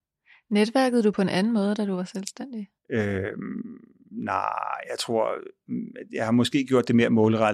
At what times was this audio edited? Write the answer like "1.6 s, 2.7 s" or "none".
2.8 s